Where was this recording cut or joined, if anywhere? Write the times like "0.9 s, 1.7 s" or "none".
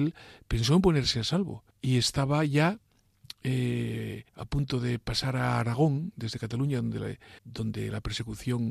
1.7 s, 4.3 s, 7.4 s